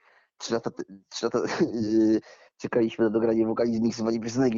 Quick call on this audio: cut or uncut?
uncut